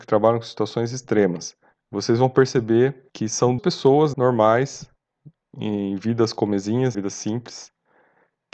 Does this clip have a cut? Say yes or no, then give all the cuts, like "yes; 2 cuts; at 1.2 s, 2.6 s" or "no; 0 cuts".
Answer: yes; 5 cuts; at 1.7 s, 3.1 s, 3.6 s, 4.1 s, 6.9 s